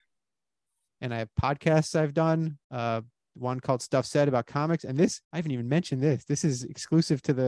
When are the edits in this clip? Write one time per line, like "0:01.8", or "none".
0:02.6
0:05.2